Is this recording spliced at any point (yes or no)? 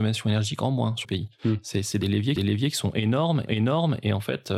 yes